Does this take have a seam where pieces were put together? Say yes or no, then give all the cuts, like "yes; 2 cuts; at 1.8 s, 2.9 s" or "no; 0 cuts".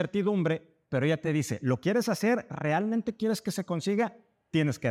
no; 0 cuts